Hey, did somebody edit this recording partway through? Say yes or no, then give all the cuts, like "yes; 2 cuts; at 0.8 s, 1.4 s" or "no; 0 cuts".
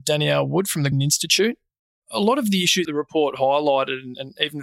yes; 2 cuts; at 0.9 s, 2.8 s